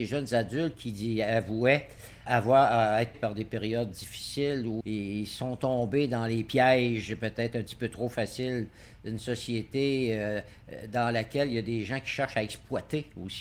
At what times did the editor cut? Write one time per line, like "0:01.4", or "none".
0:02.3
0:03.1
0:03.9
0:04.8